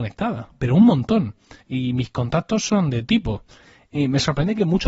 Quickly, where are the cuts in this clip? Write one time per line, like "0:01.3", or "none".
0:01.6
0:03.0

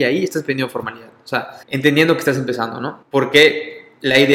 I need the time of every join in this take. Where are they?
0:01.6
0:03.0

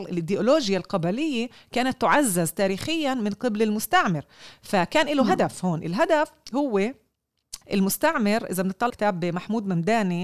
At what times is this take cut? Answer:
0:07.6
0:08.9

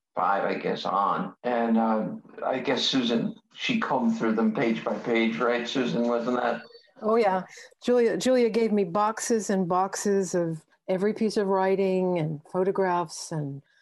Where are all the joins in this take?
0:01.4

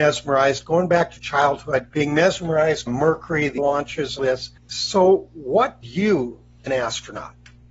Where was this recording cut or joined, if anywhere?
0:01.9
0:02.9
0:03.6
0:04.2
0:04.6
0:05.8
0:06.7

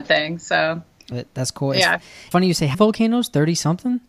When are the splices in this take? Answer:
0:01.1
0:02.3
0:02.7

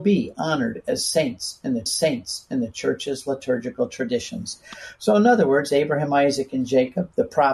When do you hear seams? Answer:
0:01.9

